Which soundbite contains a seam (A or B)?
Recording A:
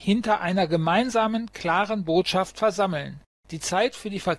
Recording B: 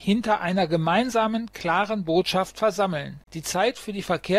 B